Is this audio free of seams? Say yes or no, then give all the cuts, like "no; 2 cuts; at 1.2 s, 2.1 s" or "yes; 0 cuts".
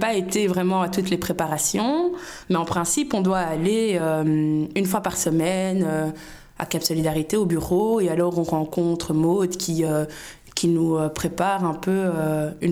yes; 0 cuts